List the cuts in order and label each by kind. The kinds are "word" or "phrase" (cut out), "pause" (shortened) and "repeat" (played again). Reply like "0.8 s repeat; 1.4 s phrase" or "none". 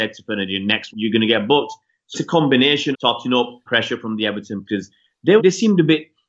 0.9 s word; 2.1 s word; 2.9 s word; 3.7 s word; 4.7 s word; 5.4 s word